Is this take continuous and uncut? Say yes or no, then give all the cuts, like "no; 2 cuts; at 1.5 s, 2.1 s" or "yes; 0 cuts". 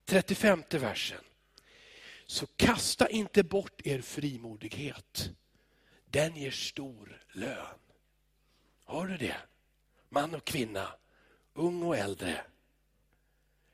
yes; 0 cuts